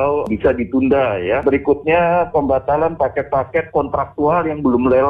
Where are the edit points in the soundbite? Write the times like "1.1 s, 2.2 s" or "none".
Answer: none